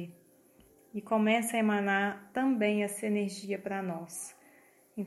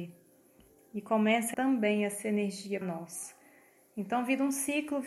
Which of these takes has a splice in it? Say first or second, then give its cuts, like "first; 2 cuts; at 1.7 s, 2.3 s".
second; 2 cuts; at 1.5 s, 2.8 s